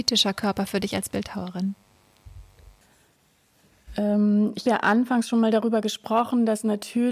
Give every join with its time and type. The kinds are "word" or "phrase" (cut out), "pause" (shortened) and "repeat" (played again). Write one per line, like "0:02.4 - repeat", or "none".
0:04.6 - word